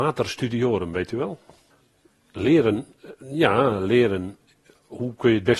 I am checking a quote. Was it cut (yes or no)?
yes